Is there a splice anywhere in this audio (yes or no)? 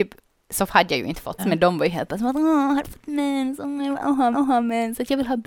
yes